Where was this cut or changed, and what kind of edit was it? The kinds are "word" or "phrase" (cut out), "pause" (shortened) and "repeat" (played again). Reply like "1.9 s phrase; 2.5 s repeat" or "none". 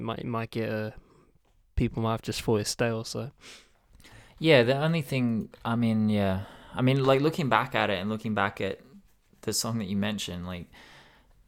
none